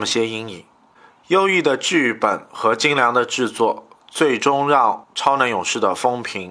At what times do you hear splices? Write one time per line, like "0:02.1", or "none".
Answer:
0:05.0